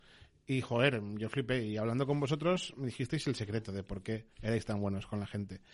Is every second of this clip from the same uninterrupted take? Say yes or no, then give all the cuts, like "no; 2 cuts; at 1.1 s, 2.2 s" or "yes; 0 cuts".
no; 1 cut; at 4.3 s